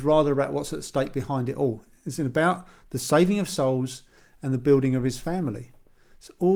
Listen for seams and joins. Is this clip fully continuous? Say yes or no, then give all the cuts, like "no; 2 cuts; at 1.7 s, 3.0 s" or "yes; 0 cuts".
yes; 0 cuts